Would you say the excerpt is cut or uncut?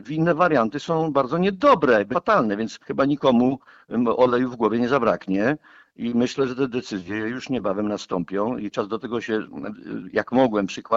cut